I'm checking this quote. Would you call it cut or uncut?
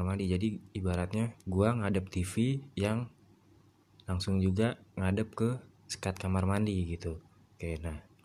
cut